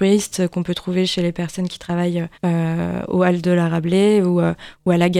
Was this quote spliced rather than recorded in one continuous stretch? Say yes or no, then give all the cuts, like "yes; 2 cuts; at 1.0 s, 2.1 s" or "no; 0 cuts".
yes; 1 cut; at 2.3 s